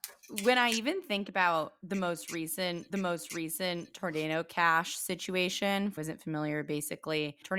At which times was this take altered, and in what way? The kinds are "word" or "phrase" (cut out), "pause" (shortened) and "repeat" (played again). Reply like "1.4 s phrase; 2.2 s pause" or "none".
2.9 s repeat; 6.0 s phrase